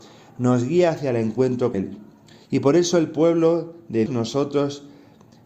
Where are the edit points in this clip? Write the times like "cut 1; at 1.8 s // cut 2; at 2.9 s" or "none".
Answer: cut 1; at 1.7 s // cut 2; at 4.1 s